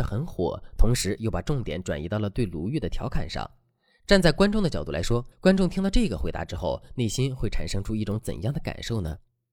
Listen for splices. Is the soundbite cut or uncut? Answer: cut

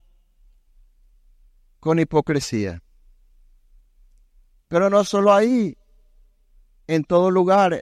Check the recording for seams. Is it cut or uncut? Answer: uncut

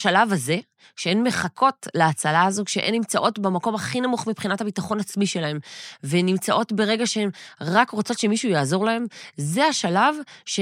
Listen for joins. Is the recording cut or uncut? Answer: uncut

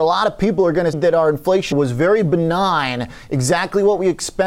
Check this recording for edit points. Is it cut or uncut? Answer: cut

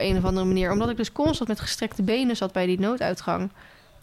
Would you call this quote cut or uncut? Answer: uncut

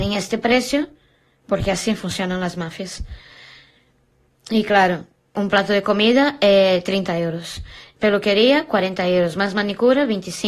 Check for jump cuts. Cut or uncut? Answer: uncut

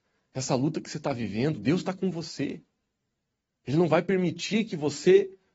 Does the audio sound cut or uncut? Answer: uncut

